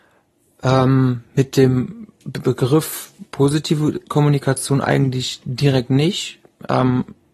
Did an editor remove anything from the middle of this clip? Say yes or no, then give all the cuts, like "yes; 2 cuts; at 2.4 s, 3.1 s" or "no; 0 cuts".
yes; 1 cut; at 3.3 s